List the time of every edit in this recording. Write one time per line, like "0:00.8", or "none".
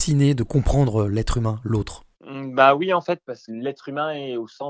0:02.1
0:03.5